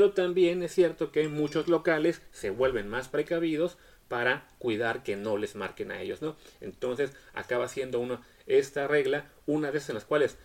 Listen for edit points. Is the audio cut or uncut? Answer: uncut